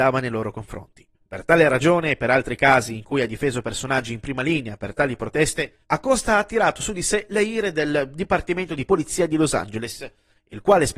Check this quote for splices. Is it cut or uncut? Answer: cut